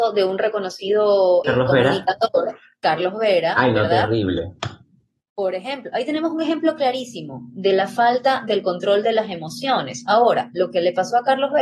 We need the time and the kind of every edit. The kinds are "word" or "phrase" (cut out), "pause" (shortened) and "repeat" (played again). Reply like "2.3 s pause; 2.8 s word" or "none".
1.4 s word